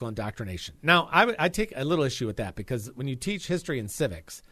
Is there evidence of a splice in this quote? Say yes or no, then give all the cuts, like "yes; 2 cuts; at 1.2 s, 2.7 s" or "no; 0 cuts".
no; 0 cuts